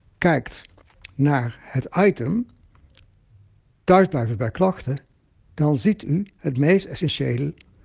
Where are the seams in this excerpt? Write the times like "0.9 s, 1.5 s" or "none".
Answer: none